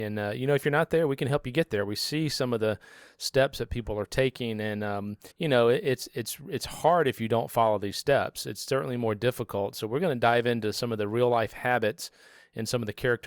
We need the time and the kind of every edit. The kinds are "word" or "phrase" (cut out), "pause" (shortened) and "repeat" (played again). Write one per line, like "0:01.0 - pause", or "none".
0:05.3 - pause